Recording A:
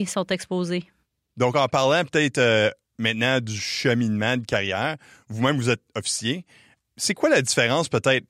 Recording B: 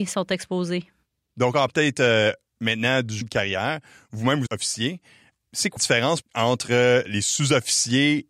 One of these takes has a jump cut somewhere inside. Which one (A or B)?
B